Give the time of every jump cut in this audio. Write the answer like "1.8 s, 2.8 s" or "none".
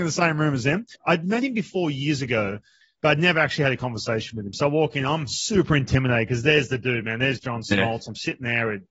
none